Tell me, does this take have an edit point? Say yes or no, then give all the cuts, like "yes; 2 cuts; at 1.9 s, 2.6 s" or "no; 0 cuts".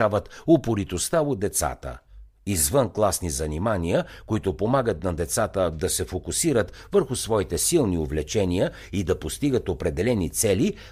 no; 0 cuts